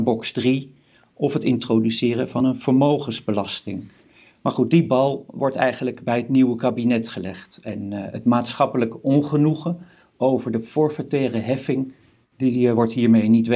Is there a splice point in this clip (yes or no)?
no